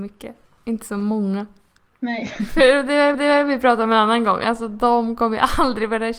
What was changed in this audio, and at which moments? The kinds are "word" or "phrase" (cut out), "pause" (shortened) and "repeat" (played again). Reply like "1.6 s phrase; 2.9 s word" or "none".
3.1 s repeat